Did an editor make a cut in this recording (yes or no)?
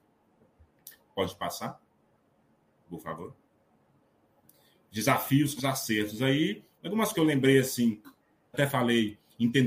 yes